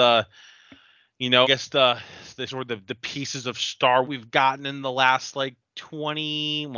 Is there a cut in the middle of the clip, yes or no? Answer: yes